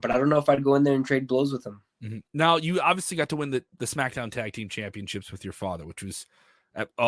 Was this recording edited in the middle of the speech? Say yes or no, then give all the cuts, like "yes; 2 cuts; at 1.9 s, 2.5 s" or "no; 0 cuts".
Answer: yes; 1 cut; at 1.9 s